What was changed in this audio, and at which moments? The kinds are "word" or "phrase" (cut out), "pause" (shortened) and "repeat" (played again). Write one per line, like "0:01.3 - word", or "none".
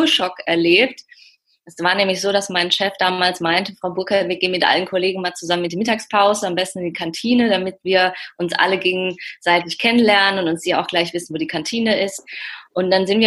none

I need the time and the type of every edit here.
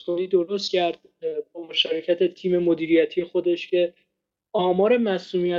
none

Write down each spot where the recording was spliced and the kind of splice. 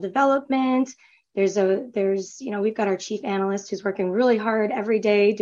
none

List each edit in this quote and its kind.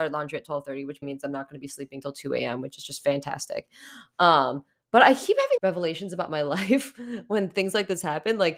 0:01.0 - word
0:05.6 - phrase

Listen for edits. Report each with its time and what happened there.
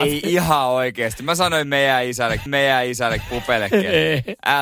0:02.5 - repeat

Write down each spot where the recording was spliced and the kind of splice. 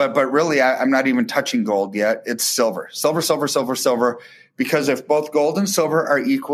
none

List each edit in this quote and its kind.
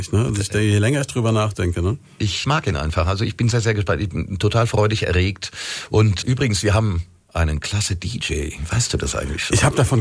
0:02.4 - word
0:03.5 - word
0:06.2 - word

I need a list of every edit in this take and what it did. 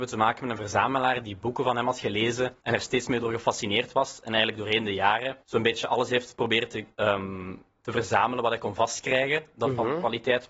0:02.6 - pause
0:05.4 - pause
0:06.9 - pause

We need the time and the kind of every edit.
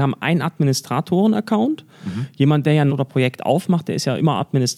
0:02.9 - phrase

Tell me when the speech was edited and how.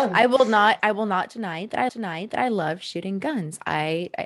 0:01.9 - repeat

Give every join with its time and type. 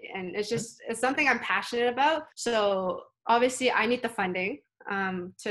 0:02.3 - pause

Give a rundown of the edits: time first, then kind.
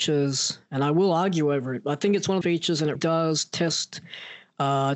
0:02.4 - phrase
0:02.9 - word

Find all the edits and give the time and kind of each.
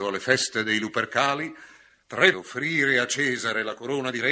0:02.3 - word

